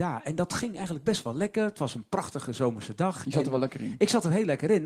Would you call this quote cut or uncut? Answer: uncut